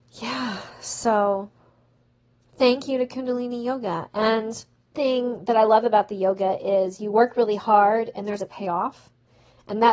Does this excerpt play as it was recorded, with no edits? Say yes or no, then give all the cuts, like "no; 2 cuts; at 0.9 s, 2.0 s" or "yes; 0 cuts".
no; 2 cuts; at 4.9 s, 8.4 s